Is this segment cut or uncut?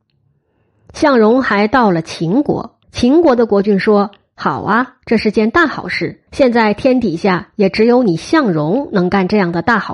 cut